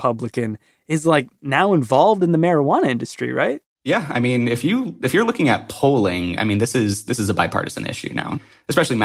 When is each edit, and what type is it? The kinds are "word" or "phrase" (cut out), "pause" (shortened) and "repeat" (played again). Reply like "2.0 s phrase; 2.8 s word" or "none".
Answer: none